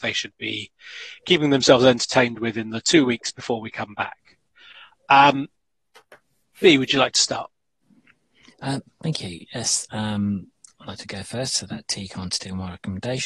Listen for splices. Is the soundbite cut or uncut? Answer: uncut